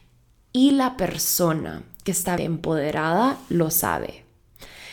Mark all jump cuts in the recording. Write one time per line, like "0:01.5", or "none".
0:02.4